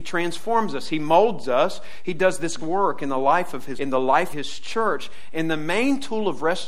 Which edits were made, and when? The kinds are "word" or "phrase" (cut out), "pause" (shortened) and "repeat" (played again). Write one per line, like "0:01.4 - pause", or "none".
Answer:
0:02.6 - word
0:03.8 - word
0:04.3 - word